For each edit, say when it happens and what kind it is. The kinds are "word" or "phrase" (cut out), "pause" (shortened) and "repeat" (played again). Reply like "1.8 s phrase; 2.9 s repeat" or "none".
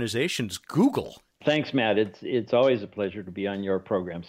none